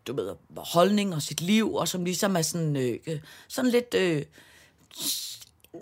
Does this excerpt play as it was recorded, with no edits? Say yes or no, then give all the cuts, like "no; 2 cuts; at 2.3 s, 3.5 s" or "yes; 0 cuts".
yes; 0 cuts